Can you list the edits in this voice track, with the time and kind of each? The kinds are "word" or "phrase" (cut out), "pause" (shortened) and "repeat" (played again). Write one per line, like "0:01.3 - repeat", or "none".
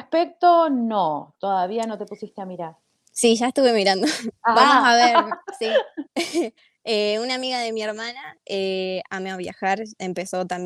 0:03.0 - pause
0:06.1 - pause
0:06.6 - pause